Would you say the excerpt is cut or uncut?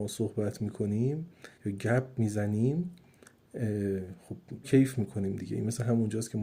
cut